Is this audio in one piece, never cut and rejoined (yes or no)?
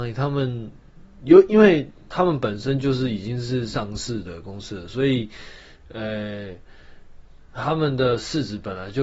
yes